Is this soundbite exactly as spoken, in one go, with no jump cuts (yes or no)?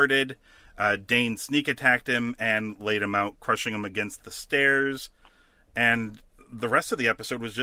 yes